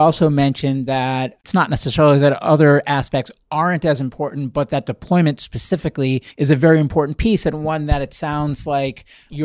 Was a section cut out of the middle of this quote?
yes; 1 cut; at 6.3 s

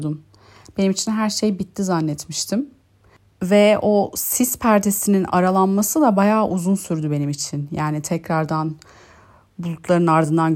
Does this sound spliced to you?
no; 0 cuts

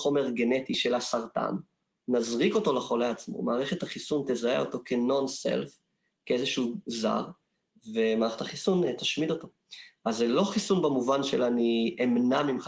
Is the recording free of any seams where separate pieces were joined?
yes; 0 cuts

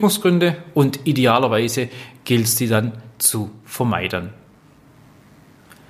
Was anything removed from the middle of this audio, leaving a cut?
no; 0 cuts

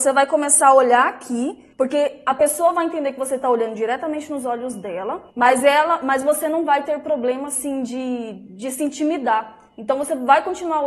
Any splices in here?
yes; 2 cuts; at 1.7 s, 5.3 s

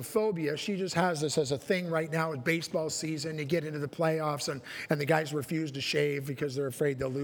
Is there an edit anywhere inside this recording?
no; 0 cuts

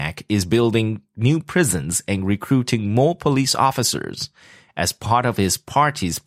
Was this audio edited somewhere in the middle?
no; 0 cuts

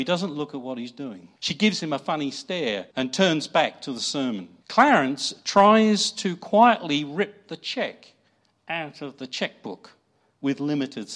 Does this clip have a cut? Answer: yes; 3 cuts; at 1.4 s, 2.9 s, 4.6 s

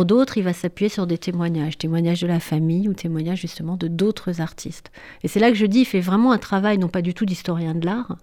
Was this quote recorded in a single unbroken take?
yes; 0 cuts

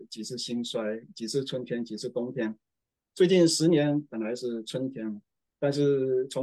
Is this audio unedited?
yes; 0 cuts

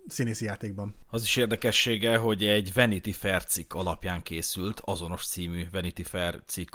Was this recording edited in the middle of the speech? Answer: no; 0 cuts

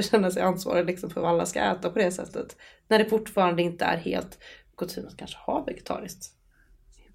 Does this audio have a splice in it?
no; 0 cuts

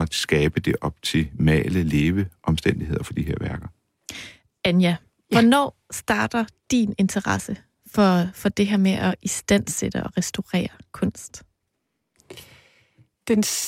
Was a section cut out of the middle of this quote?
no; 0 cuts

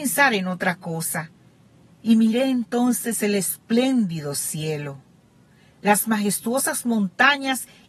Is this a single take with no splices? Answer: yes; 0 cuts

